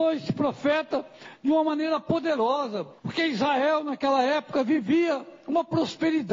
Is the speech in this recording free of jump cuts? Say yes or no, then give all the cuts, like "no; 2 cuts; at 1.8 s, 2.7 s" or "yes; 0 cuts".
no; 1 cut; at 3.0 s